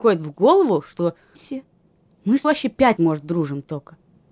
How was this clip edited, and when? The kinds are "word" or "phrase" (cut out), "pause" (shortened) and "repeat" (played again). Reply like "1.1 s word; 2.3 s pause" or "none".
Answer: 1.4 s word; 2.4 s word; 3.0 s word